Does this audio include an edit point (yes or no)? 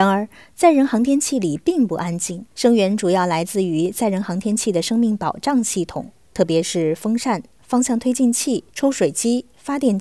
yes